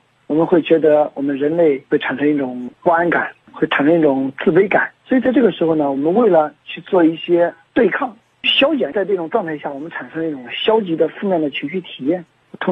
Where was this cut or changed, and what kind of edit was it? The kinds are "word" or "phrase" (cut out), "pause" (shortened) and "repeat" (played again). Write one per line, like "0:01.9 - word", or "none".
0:05.0 - pause